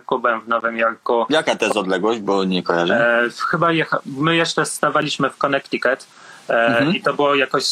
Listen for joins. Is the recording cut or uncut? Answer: uncut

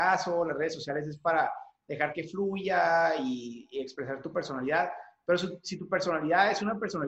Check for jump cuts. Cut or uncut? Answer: uncut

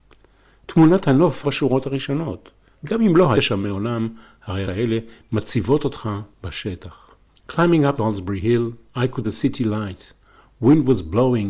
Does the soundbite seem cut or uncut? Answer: cut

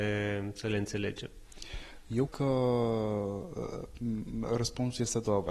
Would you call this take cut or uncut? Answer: cut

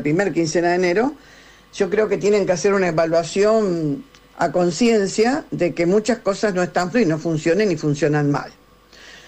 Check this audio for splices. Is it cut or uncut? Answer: cut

